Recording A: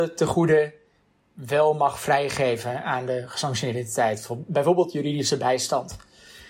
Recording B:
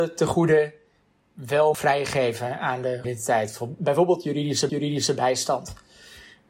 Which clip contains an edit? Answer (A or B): B